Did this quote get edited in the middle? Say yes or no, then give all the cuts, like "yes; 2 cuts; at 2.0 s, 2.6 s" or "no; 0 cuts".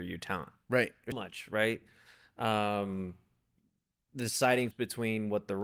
yes; 2 cuts; at 1.1 s, 4.7 s